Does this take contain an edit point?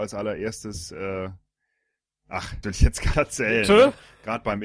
yes; 2 cuts; at 2.6 s, 3.1 s

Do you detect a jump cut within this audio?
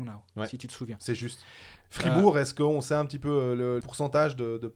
yes; 1 cut; at 3.8 s

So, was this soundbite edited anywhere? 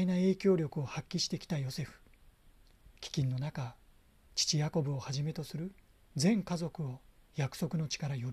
yes; 1 cut; at 3.0 s

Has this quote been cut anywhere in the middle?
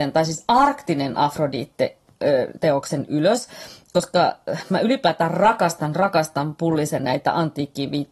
yes; 1 cut; at 4.7 s

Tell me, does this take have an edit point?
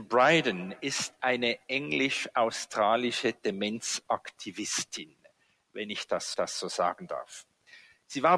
yes; 1 cut; at 6.3 s

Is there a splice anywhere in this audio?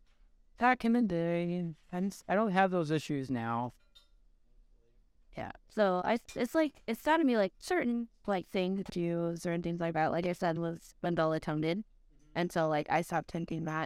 yes; 6 cuts; at 1.8 s, 5.6 s, 6.3 s, 7.5 s, 8.9 s, 10.6 s

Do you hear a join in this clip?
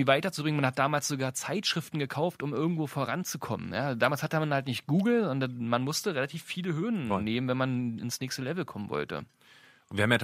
no; 0 cuts

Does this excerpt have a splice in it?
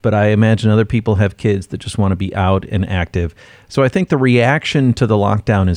no; 0 cuts

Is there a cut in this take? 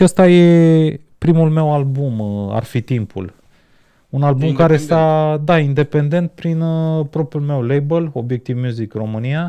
no; 0 cuts

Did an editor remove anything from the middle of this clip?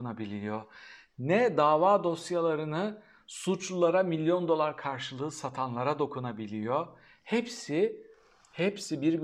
no; 0 cuts

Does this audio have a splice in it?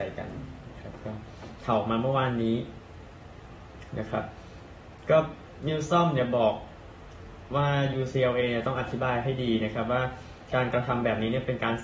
no; 0 cuts

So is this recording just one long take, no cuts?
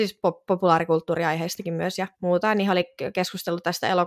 no; 1 cut; at 2.1 s

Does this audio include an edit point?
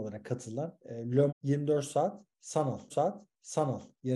yes; 2 cuts; at 1.3 s, 2.9 s

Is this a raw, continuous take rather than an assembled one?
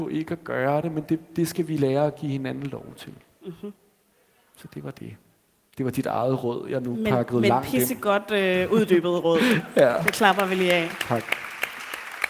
yes; 0 cuts

